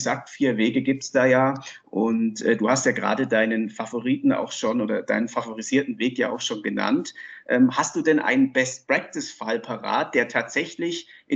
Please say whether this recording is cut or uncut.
uncut